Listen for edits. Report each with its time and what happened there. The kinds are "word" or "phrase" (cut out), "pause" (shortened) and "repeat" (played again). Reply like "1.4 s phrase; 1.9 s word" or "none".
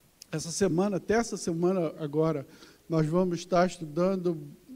none